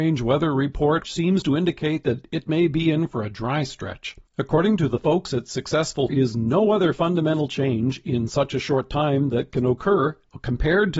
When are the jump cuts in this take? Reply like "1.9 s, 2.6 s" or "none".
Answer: 1.1 s, 4.3 s, 6.1 s